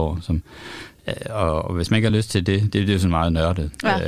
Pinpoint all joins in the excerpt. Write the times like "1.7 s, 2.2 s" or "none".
none